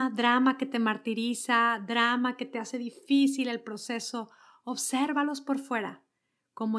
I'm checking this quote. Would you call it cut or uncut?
uncut